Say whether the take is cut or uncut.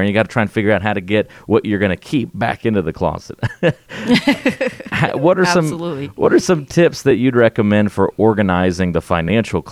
uncut